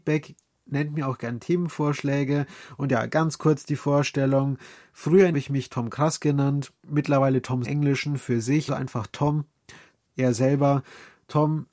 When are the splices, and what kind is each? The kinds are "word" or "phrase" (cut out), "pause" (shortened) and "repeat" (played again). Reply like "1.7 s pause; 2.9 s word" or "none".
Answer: 5.3 s phrase; 6.8 s pause; 7.6 s phrase; 8.7 s word